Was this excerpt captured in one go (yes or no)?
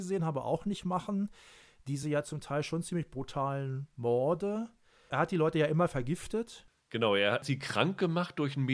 yes